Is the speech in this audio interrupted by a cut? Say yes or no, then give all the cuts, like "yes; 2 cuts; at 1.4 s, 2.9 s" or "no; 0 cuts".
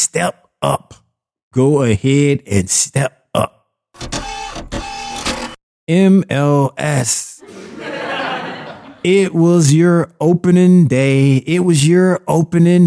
no; 0 cuts